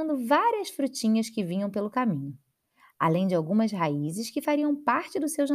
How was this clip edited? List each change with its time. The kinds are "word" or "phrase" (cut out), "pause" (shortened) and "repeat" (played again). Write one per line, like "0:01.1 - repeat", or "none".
none

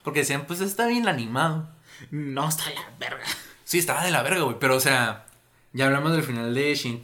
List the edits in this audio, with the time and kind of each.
none

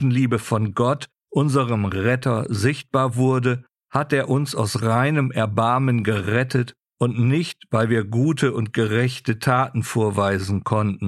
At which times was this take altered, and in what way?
none

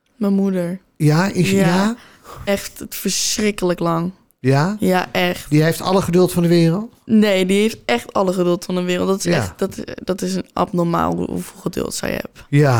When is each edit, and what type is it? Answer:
none

